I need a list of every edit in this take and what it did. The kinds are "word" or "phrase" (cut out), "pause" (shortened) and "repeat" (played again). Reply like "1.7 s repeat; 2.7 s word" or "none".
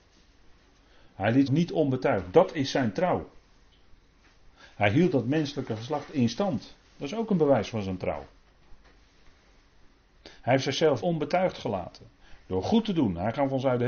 1.5 s word; 6.9 s pause; 11.0 s word